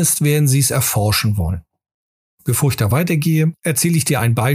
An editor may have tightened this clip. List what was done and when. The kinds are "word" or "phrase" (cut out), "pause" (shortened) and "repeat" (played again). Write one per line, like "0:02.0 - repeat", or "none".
none